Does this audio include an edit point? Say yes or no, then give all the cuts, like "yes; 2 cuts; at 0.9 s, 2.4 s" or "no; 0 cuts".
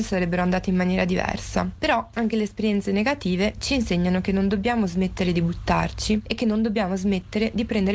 no; 0 cuts